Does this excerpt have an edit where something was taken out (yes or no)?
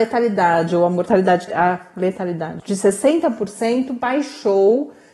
yes